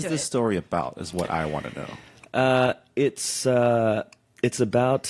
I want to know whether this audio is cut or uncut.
uncut